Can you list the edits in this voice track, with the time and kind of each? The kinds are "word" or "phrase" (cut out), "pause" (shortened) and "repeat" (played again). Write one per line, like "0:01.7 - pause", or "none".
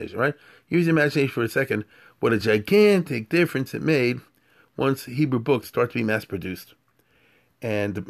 none